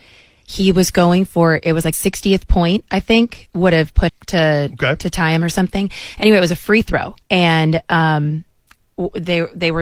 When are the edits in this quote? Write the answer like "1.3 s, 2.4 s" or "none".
1.9 s, 4.1 s, 7.2 s